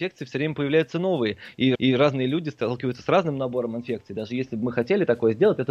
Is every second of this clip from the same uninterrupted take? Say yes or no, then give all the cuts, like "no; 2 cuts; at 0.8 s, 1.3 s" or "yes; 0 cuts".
no; 1 cut; at 1.7 s